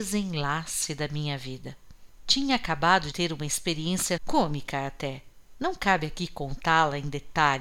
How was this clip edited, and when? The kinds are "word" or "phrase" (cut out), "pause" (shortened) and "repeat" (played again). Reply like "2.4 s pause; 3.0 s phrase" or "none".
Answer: 3.1 s word; 4.2 s word

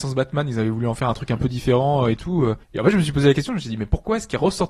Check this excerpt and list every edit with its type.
2.6 s pause

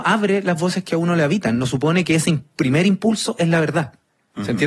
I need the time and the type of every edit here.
none

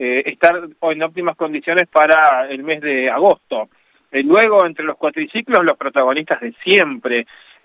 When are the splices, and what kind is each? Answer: none

